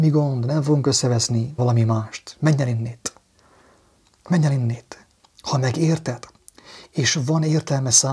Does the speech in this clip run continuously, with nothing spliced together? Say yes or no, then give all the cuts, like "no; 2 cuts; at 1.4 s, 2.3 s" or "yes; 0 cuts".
no; 1 cut; at 1.6 s